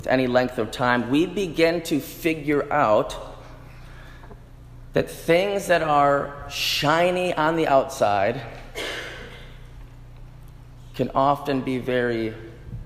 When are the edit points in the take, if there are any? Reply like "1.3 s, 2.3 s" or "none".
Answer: none